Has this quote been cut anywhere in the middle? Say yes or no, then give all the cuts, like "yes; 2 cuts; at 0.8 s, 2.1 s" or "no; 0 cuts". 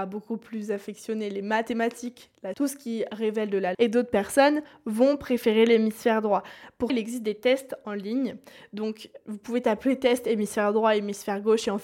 yes; 4 cuts; at 2.5 s, 3.7 s, 6.9 s, 9.2 s